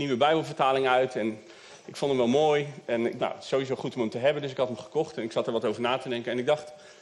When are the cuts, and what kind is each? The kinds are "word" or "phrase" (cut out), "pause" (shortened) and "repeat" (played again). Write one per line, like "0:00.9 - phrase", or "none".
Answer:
0:03.2 - word